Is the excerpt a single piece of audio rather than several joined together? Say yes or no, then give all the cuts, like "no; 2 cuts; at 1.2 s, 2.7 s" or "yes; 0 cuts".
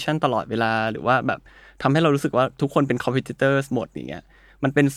yes; 0 cuts